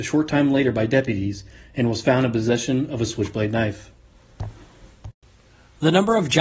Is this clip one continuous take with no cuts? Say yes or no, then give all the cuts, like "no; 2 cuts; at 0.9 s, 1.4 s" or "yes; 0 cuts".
yes; 0 cuts